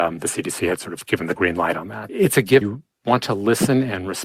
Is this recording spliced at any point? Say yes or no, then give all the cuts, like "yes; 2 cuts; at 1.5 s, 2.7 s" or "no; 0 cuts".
yes; 3 cuts; at 1.3 s, 2.1 s, 2.6 s